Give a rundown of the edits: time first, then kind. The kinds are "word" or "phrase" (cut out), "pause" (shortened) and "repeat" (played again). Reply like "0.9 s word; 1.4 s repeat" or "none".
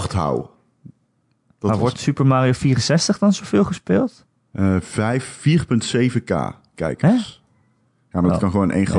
none

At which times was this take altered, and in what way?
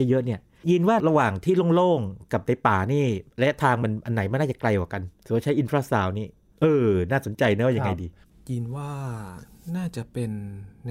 3.3 s pause; 5.1 s pause

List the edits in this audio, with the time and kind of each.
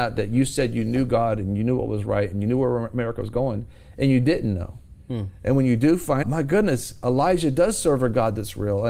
6.2 s word

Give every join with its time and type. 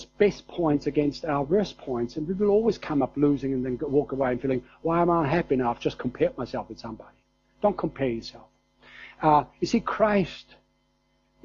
none

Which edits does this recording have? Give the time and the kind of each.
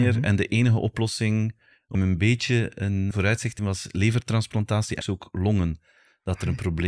1.9 s word; 3.1 s word; 3.6 s word; 5.0 s word

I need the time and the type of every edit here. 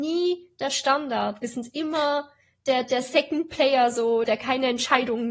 2.8 s word; 4.2 s word

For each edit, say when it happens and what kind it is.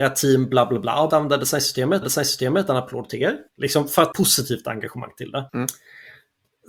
1.1 s word; 2.0 s repeat; 3.5 s pause; 4.1 s phrase; 5.5 s pause

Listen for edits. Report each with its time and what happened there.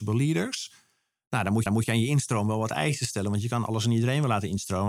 1.7 s repeat

